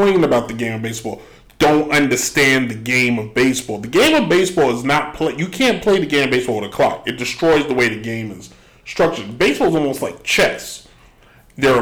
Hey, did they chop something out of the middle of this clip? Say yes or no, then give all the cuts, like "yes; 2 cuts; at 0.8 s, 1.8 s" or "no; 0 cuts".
no; 0 cuts